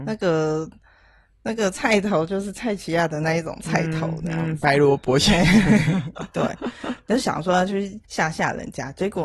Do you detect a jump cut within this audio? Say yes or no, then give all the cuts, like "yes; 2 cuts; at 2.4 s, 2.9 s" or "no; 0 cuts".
yes; 1 cut; at 8.0 s